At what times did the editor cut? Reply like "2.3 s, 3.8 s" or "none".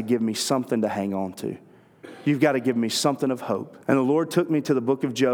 3.8 s